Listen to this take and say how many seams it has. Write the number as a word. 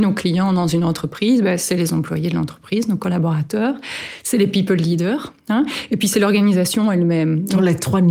one